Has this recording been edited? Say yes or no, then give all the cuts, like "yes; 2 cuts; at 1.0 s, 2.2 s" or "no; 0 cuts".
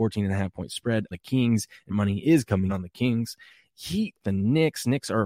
yes; 4 cuts; at 1.1 s, 1.9 s, 2.7 s, 4.2 s